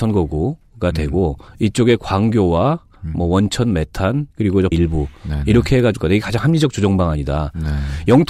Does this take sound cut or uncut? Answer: cut